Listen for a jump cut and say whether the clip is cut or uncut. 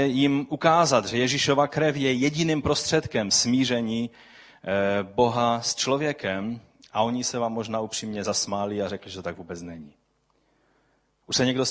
uncut